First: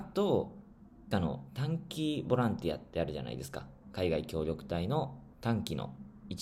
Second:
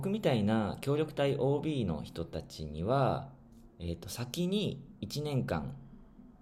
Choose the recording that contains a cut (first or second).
first